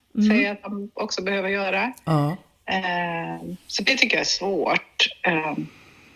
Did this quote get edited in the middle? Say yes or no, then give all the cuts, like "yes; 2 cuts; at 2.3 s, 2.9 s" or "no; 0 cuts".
no; 0 cuts